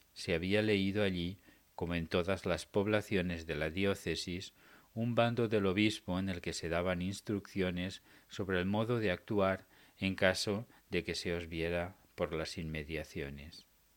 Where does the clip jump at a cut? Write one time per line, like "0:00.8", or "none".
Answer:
none